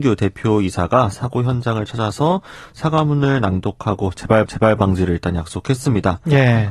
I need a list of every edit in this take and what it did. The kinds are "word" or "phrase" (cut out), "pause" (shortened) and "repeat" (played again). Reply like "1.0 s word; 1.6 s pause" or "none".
4.5 s repeat